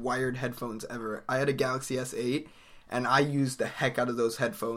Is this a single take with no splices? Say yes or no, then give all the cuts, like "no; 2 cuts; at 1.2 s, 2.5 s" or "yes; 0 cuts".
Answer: yes; 0 cuts